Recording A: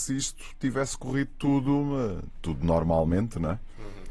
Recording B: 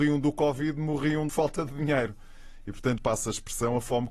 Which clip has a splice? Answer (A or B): B